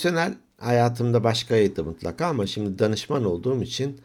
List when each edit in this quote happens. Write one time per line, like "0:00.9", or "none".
none